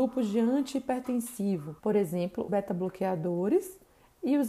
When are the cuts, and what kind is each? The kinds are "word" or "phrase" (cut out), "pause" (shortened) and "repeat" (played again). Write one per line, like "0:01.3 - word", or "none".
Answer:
0:01.8 - pause
0:02.5 - word